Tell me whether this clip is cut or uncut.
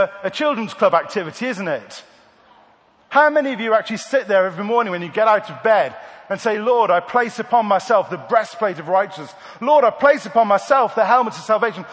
uncut